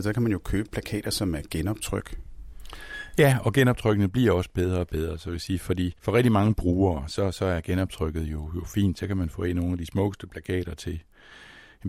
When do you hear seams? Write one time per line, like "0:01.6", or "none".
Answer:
0:06.0